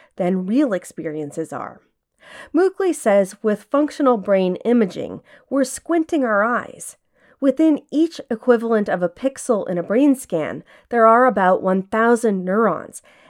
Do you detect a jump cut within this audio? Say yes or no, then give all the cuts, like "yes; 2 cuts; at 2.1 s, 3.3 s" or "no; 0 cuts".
no; 0 cuts